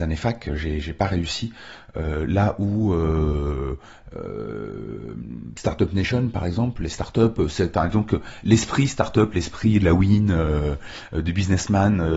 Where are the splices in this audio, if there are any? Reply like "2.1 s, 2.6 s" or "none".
none